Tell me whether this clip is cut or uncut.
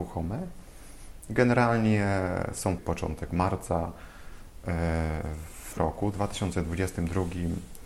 cut